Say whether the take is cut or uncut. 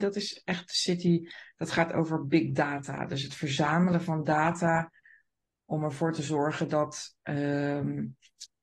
uncut